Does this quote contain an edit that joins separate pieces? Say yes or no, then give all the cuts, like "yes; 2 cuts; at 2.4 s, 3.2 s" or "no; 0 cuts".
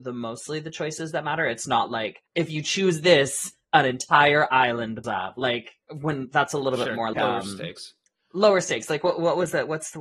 yes; 3 cuts; at 2.3 s, 5.0 s, 7.1 s